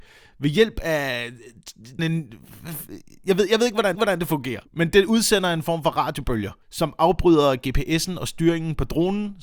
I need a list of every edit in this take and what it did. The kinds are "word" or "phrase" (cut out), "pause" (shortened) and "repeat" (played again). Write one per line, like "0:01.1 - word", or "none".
0:02.0 - word
0:03.9 - repeat
0:04.7 - pause
0:06.6 - pause